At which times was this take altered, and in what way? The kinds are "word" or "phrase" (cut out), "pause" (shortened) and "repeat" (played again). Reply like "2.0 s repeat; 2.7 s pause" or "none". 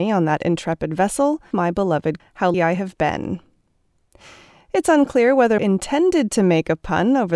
1.5 s word; 2.2 s word; 2.5 s word; 5.6 s word